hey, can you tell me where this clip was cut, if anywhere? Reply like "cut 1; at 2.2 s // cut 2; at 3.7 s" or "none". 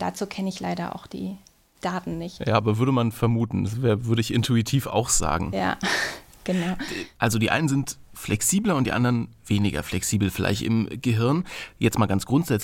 none